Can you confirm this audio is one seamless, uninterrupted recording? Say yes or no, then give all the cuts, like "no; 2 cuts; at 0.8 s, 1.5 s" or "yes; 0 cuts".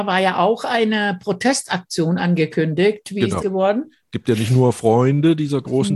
no; 1 cut; at 3.4 s